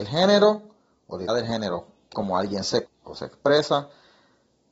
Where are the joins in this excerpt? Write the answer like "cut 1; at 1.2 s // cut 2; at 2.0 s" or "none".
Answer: cut 1; at 1.3 s // cut 2; at 2.1 s // cut 3; at 2.8 s